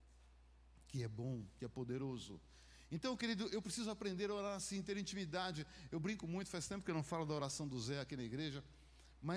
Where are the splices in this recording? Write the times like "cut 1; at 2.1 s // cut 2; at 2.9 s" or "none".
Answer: none